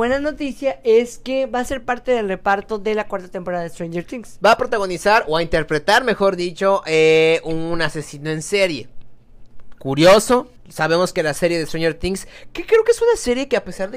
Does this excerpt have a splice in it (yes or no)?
yes